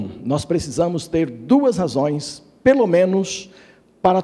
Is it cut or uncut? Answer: uncut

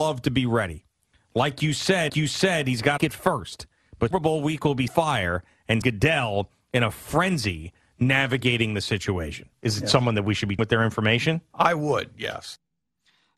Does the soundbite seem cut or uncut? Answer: cut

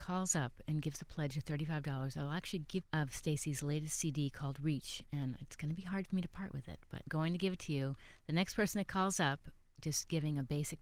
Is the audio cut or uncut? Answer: cut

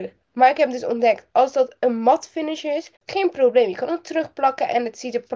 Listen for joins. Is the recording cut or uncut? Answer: cut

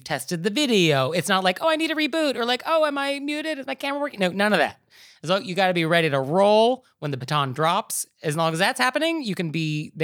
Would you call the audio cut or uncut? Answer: uncut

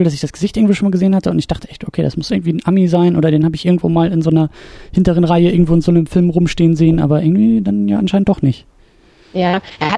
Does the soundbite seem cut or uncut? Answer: uncut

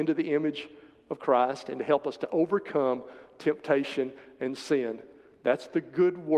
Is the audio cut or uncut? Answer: uncut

